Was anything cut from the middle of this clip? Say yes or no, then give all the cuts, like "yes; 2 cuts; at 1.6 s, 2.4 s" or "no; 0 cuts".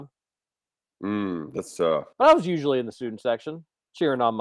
yes; 1 cut; at 2.1 s